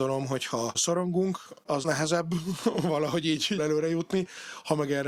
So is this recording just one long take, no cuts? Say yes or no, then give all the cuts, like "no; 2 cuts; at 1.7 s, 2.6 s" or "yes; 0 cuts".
no; 2 cuts; at 1.8 s, 3.6 s